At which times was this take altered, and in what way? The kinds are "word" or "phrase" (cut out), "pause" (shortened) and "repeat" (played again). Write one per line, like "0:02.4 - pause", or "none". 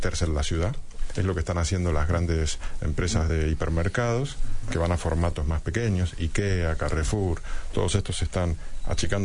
none